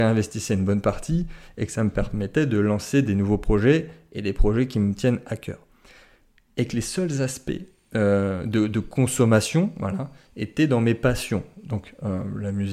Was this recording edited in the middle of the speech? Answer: no; 0 cuts

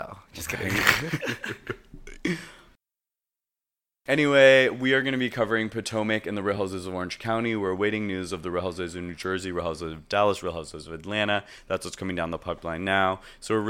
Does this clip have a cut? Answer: no; 0 cuts

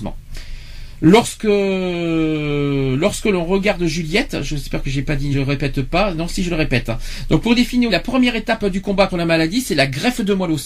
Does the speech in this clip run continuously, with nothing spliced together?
no; 3 cuts; at 5.3 s, 7.9 s, 9.1 s

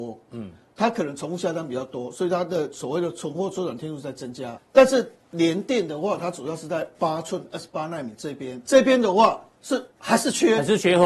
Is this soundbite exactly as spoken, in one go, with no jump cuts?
no; 3 cuts; at 4.6 s, 8.6 s, 9.9 s

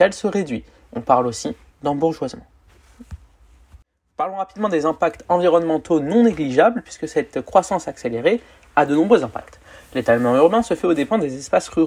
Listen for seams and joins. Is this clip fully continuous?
no; 1 cut; at 1.7 s

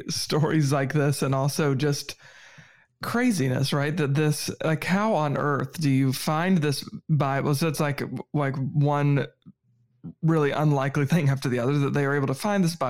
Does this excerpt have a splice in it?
no; 0 cuts

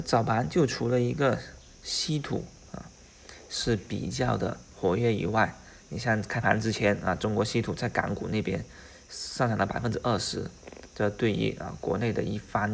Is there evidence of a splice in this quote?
no; 0 cuts

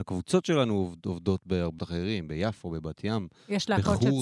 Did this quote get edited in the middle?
yes; 1 cut; at 1.8 s

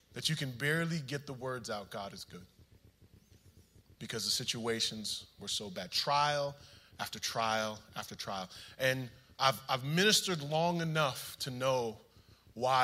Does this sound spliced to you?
no; 0 cuts

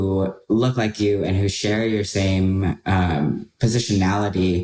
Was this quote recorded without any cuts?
yes; 0 cuts

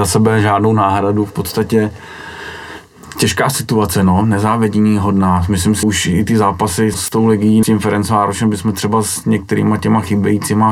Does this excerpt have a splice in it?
yes; 3 cuts; at 5.8 s, 6.9 s, 7.6 s

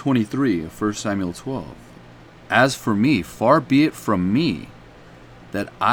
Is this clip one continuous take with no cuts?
yes; 0 cuts

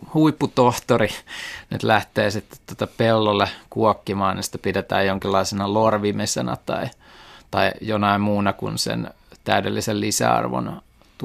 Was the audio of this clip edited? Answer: no; 0 cuts

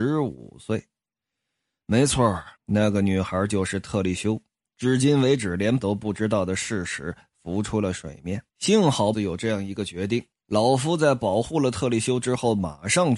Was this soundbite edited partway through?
yes; 6 cuts; at 2.6 s, 4.6 s, 5.8 s, 8.5 s, 9.1 s, 10.4 s

